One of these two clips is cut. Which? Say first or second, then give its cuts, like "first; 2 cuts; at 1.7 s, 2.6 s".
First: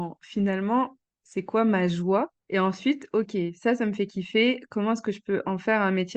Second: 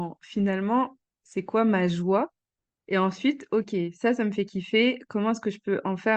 first; 1 cut; at 2.3 s